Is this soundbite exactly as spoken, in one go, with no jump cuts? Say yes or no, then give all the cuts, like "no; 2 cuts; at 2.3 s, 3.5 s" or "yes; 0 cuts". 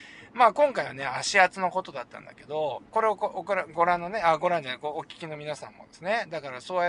no; 1 cut; at 2.9 s